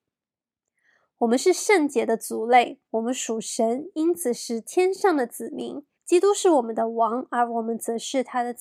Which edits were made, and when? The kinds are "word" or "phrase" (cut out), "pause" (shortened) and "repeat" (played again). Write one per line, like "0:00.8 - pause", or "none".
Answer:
0:02.8 - pause
0:05.9 - pause